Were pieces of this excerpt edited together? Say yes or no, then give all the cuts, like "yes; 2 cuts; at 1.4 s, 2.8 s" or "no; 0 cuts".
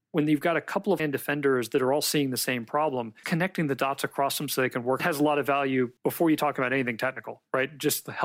yes; 4 cuts; at 1.0 s, 3.2 s, 5.0 s, 6.0 s